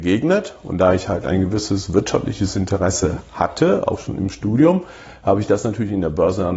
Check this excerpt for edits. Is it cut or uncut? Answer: uncut